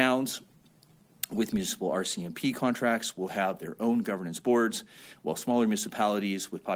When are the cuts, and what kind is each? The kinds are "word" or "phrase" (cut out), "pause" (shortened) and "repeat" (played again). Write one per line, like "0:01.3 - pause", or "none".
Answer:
none